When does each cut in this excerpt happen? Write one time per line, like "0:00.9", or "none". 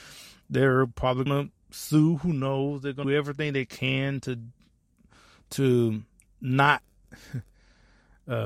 0:01.3
0:03.0
0:06.3